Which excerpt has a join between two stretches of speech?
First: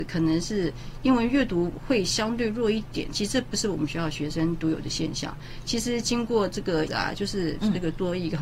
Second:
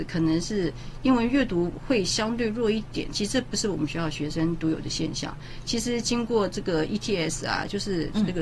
first; 1 cut; at 6.9 s

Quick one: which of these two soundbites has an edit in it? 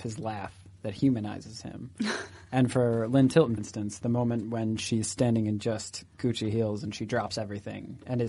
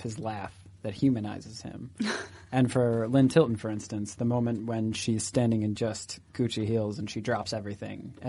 first; 1 cut; at 3.6 s

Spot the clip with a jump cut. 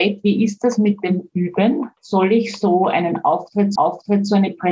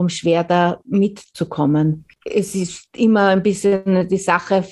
first; 2 cuts; at 2.0 s, 3.8 s

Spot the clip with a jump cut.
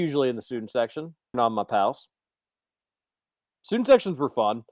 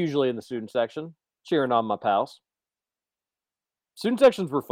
first; 1 cut; at 1.3 s

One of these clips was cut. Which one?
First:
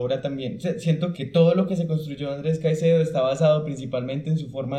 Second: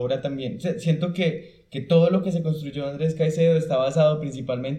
first; 1 cut; at 1.1 s

